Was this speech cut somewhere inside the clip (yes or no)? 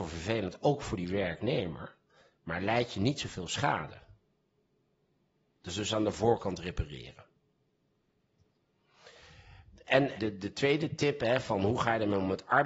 yes